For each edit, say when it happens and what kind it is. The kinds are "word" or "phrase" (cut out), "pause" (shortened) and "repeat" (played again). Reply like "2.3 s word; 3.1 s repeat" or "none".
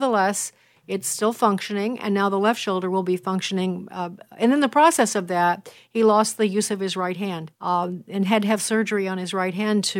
7.5 s pause